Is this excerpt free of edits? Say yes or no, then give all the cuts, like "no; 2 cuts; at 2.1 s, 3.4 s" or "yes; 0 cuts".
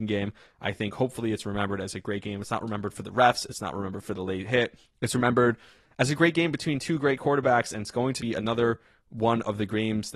no; 1 cut; at 8.2 s